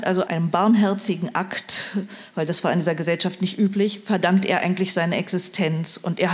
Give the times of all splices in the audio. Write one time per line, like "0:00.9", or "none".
none